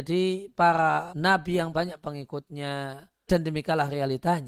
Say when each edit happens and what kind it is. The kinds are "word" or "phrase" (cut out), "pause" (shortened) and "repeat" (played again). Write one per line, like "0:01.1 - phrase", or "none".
0:01.1 - word
0:01.7 - word
0:03.3 - word

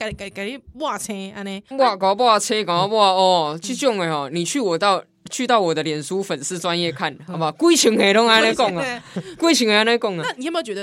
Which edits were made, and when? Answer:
0:01.7 - pause

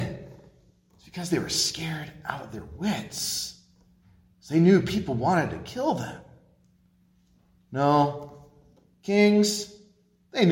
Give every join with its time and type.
none

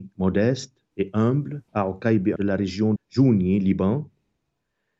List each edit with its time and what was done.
0:00.9 - pause
0:01.7 - pause
0:02.4 - word
0:03.0 - word

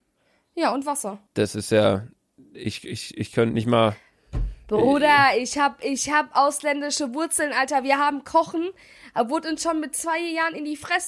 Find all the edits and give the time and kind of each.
0:01.3 - pause

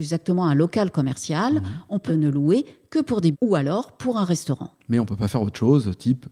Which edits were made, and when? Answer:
0:02.1 - phrase
0:03.3 - word

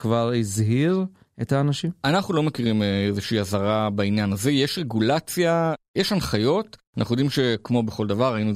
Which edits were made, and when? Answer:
none

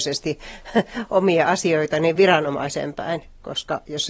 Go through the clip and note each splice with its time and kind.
none

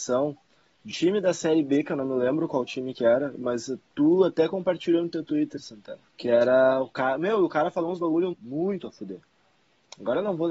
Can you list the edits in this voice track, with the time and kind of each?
0:00.9 - word
0:06.1 - pause
0:08.3 - word

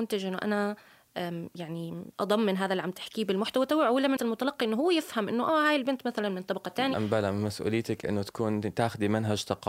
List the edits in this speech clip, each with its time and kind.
0:02.1 - pause
0:04.2 - word
0:06.9 - word

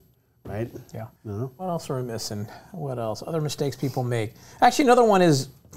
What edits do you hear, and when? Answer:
0:01.2 - pause

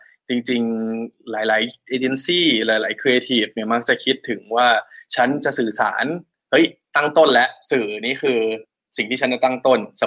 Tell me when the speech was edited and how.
none

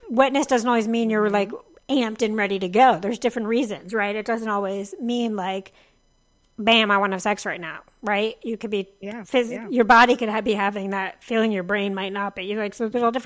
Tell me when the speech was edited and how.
none

